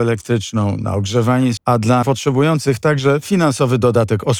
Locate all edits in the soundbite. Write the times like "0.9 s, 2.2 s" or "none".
1.6 s, 2.0 s